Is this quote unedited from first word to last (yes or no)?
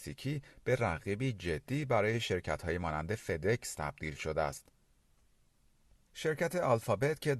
yes